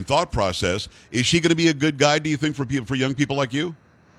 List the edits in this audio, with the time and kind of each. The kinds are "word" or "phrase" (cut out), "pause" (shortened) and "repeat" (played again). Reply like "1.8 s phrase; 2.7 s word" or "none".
none